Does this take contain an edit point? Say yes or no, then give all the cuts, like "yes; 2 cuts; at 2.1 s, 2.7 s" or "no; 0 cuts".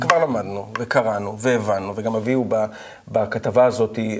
no; 0 cuts